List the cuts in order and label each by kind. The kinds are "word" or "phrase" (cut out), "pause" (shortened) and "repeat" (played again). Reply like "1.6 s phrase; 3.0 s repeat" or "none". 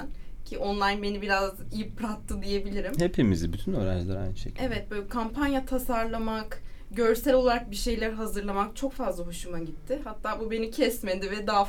none